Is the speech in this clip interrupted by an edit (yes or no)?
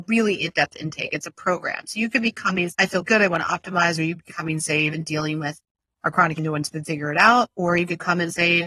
yes